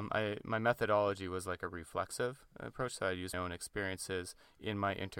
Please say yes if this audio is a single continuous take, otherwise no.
no